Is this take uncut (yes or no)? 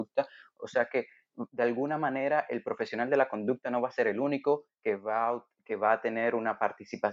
yes